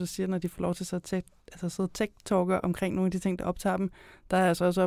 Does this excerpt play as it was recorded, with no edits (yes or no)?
yes